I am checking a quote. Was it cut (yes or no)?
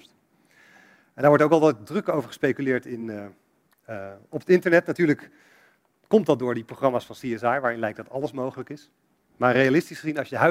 no